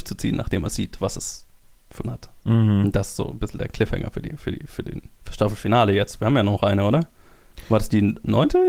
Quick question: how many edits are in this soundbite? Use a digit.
2